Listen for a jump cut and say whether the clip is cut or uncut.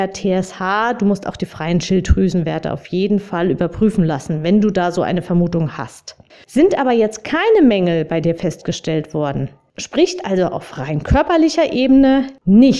cut